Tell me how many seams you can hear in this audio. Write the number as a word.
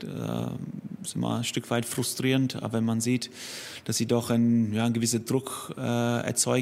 zero